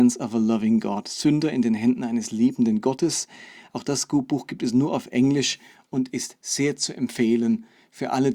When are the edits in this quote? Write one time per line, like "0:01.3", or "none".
none

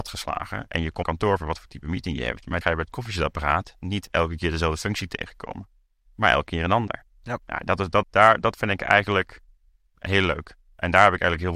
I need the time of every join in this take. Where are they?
0:01.0
0:02.6
0:08.0
0:09.9

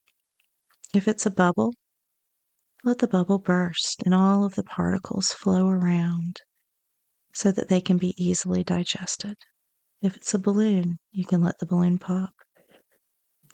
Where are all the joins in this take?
none

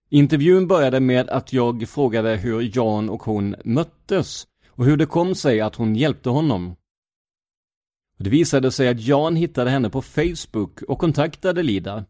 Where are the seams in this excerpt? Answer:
none

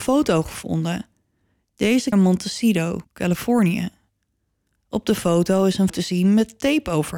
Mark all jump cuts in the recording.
0:02.1
0:03.0
0:05.9

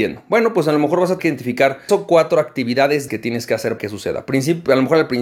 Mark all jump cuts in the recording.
0:01.2
0:01.9
0:03.1
0:03.8

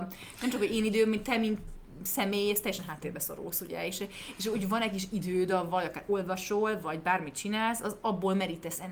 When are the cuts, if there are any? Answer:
none

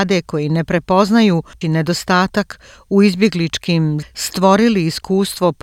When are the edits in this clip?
0:01.6
0:04.0

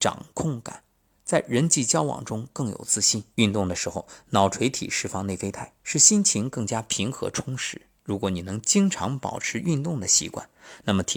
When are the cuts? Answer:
0:03.3
0:05.8
0:08.0

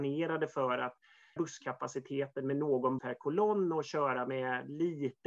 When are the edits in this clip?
0:01.4
0:03.0

